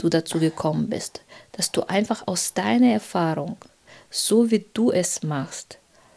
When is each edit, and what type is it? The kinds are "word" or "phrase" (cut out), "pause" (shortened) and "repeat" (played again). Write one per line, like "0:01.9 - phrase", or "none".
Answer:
none

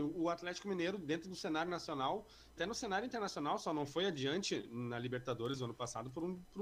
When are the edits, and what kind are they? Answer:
0:02.6 - word

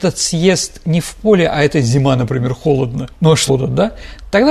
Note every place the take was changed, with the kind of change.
0:03.1 - pause
0:03.5 - phrase

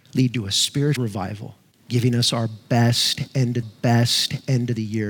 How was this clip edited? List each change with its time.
0:01.0 - word
0:01.7 - pause
0:03.6 - repeat

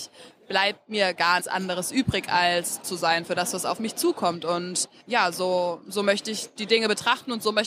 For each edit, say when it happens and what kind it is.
0:01.4 - word
0:02.8 - word
0:05.0 - word

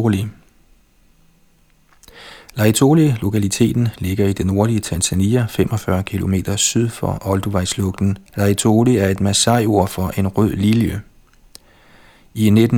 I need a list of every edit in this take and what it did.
0:08.3 - pause

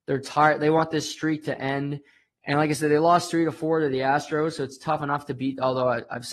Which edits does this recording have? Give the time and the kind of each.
none

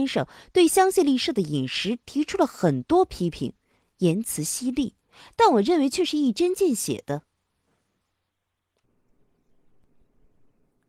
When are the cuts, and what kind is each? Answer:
none

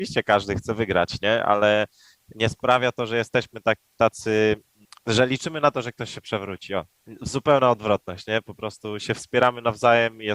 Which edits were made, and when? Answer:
none

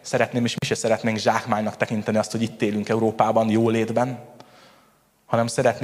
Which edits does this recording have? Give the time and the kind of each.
none

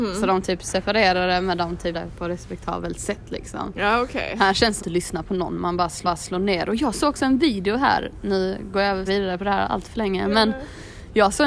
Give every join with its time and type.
0:01.9 - word
0:04.8 - phrase
0:06.0 - repeat
0:09.1 - phrase

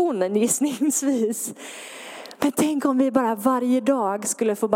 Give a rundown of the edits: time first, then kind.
none

